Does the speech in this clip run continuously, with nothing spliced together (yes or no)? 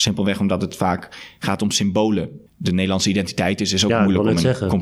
no